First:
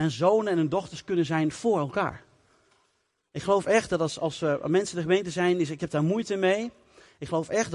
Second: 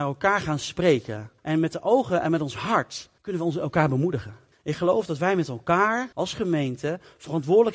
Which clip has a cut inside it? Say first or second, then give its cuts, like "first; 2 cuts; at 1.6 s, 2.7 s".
second; 4 cuts; at 1.4 s, 3.2 s, 4.5 s, 6.1 s